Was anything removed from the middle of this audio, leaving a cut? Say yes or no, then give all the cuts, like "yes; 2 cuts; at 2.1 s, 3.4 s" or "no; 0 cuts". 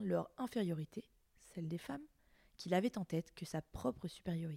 no; 0 cuts